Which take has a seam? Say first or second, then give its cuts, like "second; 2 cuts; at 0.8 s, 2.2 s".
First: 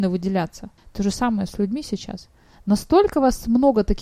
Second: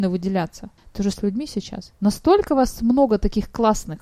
second; 2 cuts; at 1.1 s, 2.0 s